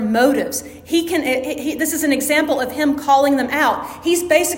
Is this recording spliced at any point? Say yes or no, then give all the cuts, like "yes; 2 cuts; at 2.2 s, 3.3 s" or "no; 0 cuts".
no; 0 cuts